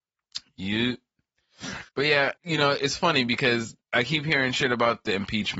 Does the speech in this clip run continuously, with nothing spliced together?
no; 3 cuts; at 1.9 s, 2.4 s, 3.8 s

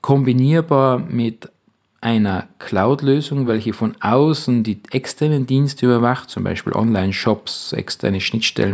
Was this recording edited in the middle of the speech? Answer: no; 0 cuts

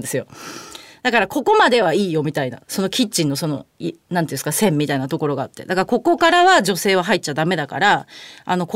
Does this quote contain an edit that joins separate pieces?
no; 0 cuts

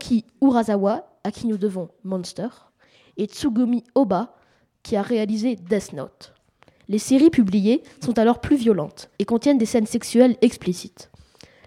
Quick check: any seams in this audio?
yes; 1 cut; at 9.1 s

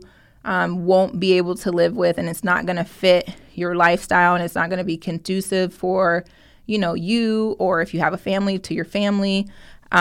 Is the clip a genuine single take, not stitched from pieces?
yes; 0 cuts

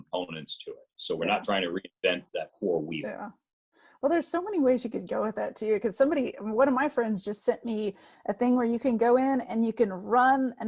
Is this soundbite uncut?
no; 1 cut; at 2.3 s

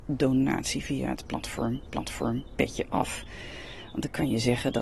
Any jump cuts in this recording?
yes; 1 cut; at 1.9 s

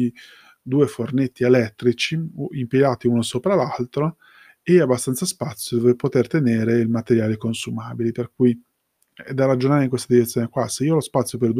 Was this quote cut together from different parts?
no; 0 cuts

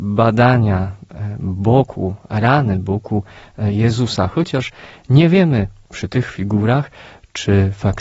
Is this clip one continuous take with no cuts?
yes; 0 cuts

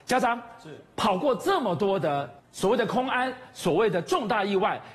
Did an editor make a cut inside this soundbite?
yes; 1 cut; at 2.4 s

